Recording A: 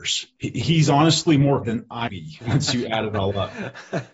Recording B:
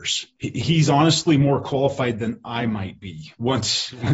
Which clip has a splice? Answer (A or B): A